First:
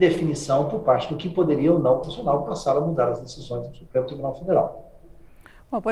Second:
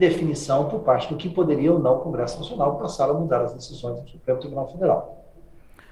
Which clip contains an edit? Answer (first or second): first